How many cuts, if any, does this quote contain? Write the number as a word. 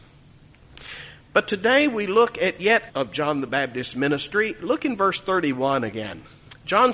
one